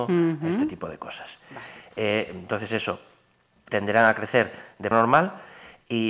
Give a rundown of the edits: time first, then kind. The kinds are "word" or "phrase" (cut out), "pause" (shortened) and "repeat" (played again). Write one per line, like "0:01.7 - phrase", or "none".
0:03.7 - word
0:04.9 - word

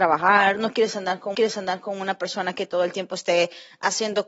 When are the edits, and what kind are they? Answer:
0:01.3 - repeat

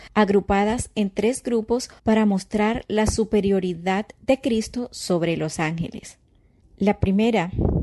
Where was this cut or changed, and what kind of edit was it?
0:02.0 - pause

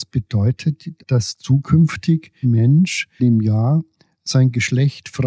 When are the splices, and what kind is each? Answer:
0:01.0 - word
0:02.4 - word
0:03.2 - word

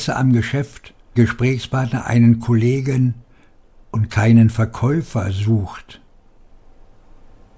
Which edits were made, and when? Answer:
0:01.2 - phrase

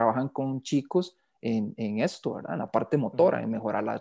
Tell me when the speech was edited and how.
none

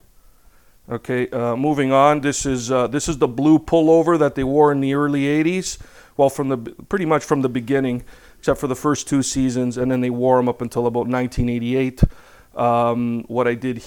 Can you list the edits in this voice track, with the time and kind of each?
none

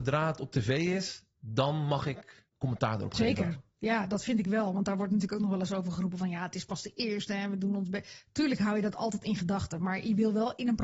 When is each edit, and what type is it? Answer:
0:02.5 - pause

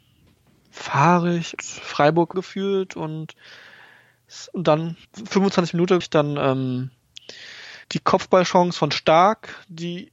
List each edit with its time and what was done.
0:01.6 - word
0:02.3 - phrase
0:05.0 - pause
0:06.0 - word
0:07.8 - pause

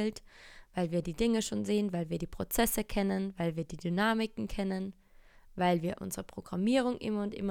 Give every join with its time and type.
none

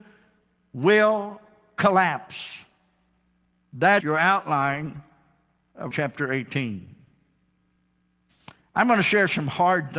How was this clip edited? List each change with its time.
0:04.0 - word
0:05.9 - word

